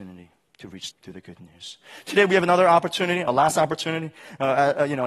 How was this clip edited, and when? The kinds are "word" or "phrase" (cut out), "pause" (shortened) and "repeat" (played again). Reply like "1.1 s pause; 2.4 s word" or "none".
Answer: 0.9 s word